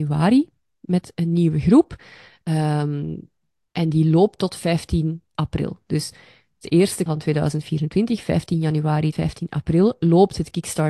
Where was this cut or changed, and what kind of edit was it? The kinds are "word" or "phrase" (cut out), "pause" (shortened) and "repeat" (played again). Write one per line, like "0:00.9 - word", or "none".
0:07.1 - word
0:09.1 - word